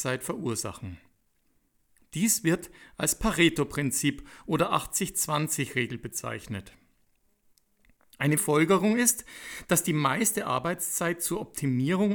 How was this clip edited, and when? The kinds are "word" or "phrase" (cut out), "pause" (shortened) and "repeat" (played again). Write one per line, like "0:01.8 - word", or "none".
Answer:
0:08.4 - word